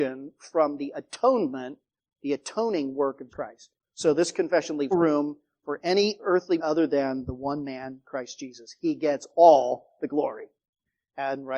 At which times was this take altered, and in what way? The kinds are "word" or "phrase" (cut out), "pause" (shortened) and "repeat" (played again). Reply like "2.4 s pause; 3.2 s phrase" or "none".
3.3 s word; 4.9 s word; 6.6 s word